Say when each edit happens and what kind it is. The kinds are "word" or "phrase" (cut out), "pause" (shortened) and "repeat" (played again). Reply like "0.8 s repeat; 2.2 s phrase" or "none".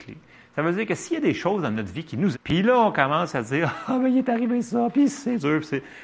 2.3 s word